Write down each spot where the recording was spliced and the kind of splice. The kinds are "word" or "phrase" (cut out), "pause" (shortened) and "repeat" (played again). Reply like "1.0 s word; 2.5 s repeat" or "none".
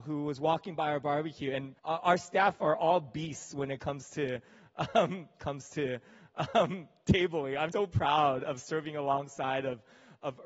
1.8 s pause; 5.4 s repeat; 7.7 s word